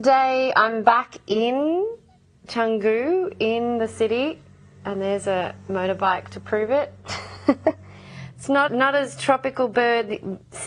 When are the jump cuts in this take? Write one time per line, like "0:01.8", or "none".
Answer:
0:08.7